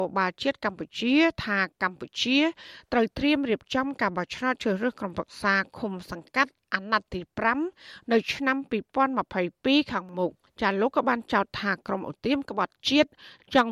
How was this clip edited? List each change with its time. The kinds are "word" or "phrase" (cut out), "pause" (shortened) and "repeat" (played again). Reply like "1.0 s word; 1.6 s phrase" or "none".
10.5 s pause